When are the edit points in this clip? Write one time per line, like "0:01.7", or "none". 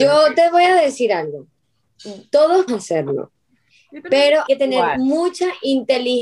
0:02.7
0:04.5